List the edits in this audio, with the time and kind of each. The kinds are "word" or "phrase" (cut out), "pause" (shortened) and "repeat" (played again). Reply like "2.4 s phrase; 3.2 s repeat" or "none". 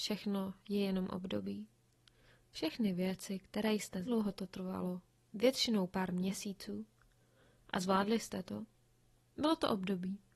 4.1 s phrase